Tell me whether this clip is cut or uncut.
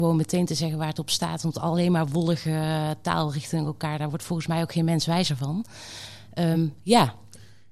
uncut